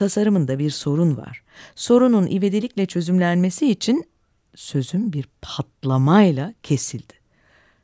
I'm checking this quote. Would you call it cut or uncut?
uncut